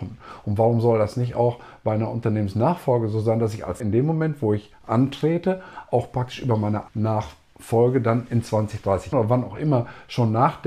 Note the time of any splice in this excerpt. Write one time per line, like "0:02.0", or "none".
0:03.8
0:06.9
0:09.1